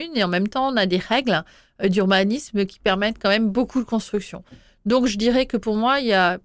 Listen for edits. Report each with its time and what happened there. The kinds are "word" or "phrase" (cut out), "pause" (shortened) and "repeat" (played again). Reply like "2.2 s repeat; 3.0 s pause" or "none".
none